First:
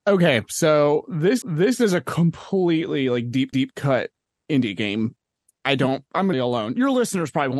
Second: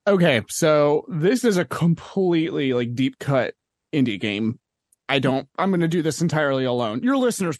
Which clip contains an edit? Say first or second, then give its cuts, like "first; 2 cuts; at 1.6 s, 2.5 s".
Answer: first; 3 cuts; at 1.4 s, 3.5 s, 6.3 s